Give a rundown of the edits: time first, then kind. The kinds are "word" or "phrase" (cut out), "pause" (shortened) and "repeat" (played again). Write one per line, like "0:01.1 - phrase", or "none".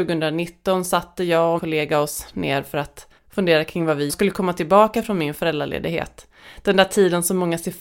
0:01.6 - word
0:03.2 - pause
0:04.1 - phrase